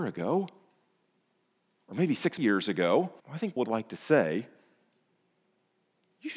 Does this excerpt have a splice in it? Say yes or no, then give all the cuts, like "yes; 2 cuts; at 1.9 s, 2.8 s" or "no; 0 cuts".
yes; 3 cuts; at 2.4 s, 3.2 s, 3.6 s